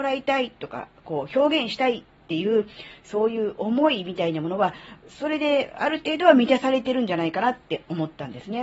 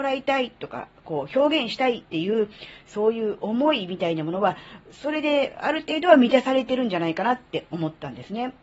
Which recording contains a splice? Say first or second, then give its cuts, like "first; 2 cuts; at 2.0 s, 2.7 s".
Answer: second; 1 cut; at 2.0 s